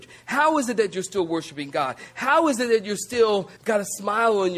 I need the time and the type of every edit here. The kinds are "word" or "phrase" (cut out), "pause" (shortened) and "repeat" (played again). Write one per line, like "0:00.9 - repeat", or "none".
0:03.6 - pause